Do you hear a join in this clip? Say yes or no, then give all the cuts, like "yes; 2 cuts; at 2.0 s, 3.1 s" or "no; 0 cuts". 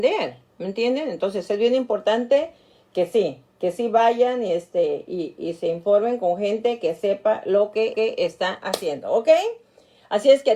yes; 1 cut; at 7.9 s